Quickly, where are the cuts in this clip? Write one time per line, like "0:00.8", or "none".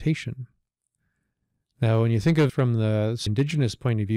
0:02.5
0:03.3